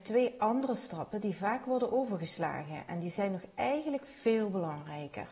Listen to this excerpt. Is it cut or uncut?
uncut